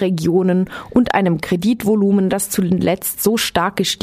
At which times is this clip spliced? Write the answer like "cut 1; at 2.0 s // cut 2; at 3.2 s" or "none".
none